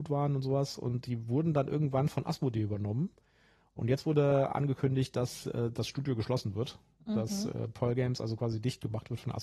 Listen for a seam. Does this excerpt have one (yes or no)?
no